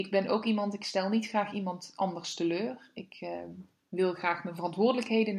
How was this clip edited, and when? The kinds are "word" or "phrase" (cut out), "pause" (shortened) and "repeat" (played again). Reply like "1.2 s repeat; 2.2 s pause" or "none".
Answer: none